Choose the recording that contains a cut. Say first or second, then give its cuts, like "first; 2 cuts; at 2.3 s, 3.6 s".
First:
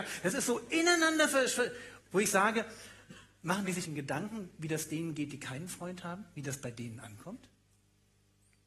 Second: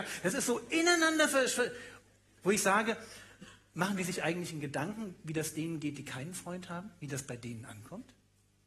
first; 2 cuts; at 2.0 s, 3.8 s